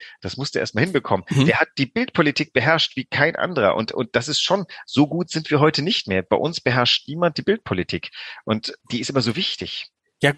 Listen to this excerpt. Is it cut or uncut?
cut